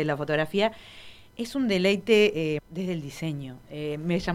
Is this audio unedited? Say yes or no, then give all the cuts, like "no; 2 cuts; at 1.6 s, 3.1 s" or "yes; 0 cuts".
no; 1 cut; at 2.6 s